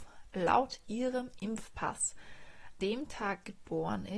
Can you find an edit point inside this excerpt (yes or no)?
yes